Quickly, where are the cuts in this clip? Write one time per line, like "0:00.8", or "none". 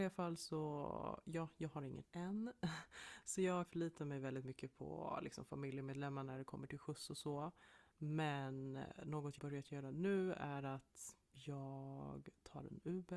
0:02.0
0:03.7
0:09.4
0:11.2